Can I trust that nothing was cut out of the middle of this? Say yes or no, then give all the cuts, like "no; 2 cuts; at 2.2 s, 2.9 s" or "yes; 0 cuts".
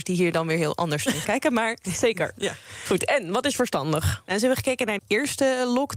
no; 2 cuts; at 1.2 s, 5.0 s